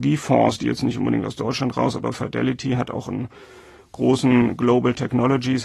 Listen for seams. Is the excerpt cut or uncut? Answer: uncut